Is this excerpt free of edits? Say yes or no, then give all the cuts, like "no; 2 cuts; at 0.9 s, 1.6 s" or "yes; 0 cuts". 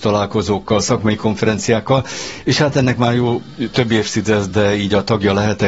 yes; 0 cuts